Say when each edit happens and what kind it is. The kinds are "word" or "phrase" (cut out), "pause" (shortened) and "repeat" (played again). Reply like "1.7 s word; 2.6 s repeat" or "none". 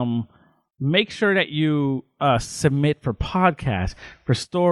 none